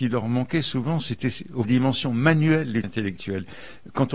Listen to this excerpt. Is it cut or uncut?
cut